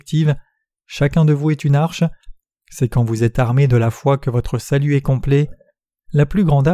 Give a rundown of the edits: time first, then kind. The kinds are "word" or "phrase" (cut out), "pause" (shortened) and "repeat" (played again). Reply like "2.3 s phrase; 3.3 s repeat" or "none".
none